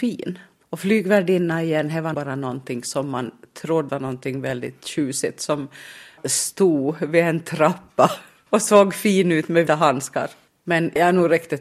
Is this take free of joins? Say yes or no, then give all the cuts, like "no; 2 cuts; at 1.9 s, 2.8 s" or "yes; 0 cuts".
no; 4 cuts; at 2.1 s, 3.9 s, 6.2 s, 9.7 s